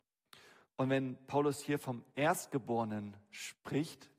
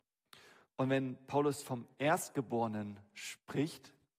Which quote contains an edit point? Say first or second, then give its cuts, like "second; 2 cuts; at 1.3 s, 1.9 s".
second; 1 cut; at 1.6 s